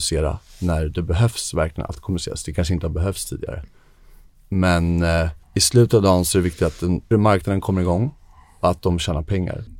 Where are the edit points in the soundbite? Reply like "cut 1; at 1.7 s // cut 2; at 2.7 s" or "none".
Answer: cut 1; at 5.4 s // cut 2; at 7.1 s